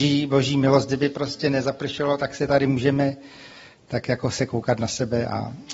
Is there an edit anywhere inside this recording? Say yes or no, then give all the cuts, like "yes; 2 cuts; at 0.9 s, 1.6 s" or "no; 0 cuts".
no; 0 cuts